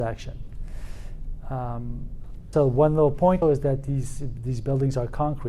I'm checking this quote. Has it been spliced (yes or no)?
yes